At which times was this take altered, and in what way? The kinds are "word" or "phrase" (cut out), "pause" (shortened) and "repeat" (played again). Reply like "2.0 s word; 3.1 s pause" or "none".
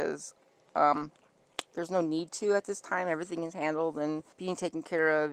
4.3 s pause